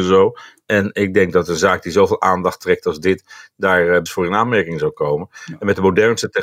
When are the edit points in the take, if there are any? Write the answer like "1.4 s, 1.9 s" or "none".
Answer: 4.1 s